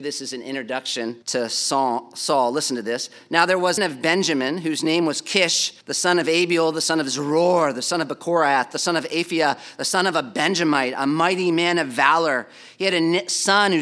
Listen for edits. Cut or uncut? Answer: cut